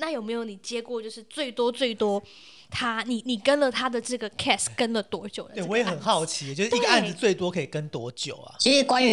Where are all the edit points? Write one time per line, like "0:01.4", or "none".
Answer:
none